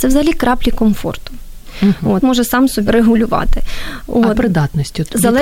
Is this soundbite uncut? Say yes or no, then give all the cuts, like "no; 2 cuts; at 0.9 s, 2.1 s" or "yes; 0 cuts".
no; 3 cuts; at 2.2 s, 2.9 s, 4.3 s